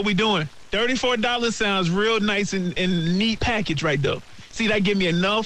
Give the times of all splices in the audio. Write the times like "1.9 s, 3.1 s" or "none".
3.4 s